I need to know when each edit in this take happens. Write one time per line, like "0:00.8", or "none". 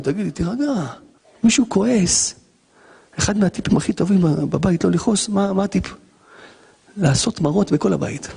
0:01.2